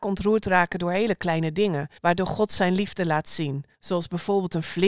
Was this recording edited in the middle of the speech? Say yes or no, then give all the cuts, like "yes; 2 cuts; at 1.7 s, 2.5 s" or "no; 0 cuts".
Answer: yes; 2 cuts; at 2.0 s, 3.7 s